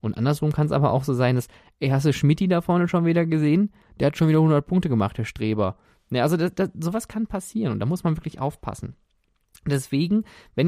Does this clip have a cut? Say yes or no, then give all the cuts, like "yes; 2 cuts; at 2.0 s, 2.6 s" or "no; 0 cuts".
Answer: no; 0 cuts